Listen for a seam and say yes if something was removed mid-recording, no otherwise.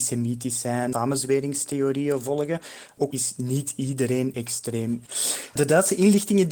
yes